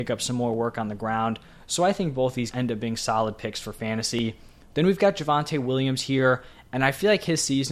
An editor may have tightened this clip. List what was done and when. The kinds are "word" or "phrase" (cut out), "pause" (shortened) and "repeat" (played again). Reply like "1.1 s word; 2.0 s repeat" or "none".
2.5 s word